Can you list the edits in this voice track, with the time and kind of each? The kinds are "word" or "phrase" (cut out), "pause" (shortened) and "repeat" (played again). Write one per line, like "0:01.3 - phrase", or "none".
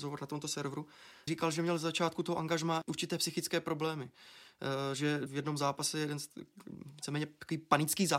0:01.3 - word
0:02.8 - word
0:05.3 - word